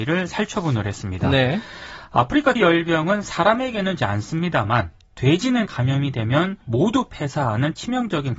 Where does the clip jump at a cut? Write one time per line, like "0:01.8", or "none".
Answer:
0:02.6
0:04.0
0:05.7
0:06.6

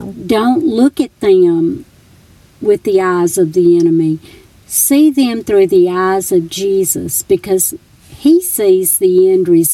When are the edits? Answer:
none

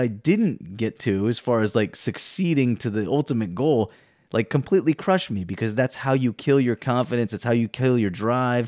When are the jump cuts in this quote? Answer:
none

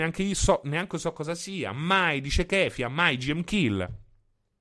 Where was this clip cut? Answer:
none

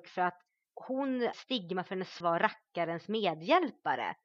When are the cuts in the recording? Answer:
0:01.3
0:02.2

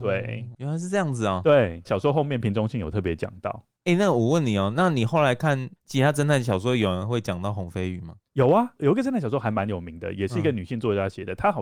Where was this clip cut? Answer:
0:05.8
0:08.2

